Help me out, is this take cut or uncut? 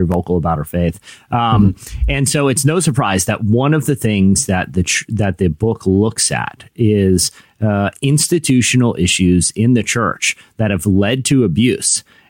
uncut